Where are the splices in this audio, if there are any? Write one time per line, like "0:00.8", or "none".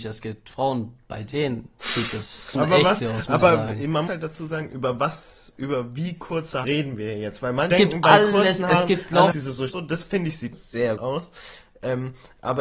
0:02.5
0:03.0
0:04.1
0:06.6
0:07.7
0:09.3
0:09.7
0:10.5
0:11.0